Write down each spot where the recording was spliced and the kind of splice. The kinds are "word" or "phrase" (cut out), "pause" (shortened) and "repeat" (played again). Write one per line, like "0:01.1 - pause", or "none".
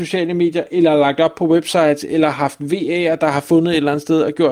none